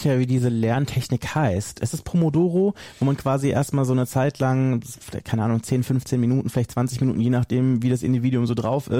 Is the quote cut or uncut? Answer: uncut